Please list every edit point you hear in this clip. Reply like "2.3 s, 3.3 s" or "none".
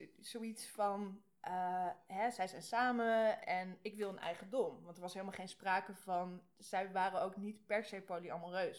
3.4 s

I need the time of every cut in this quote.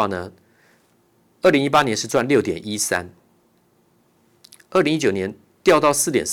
none

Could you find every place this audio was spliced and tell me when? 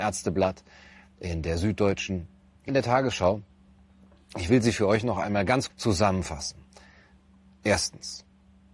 2.7 s, 5.7 s

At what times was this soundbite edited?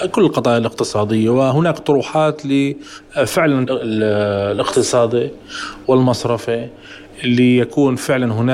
3.7 s

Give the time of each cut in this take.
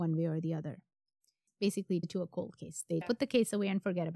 2.0 s, 3.0 s

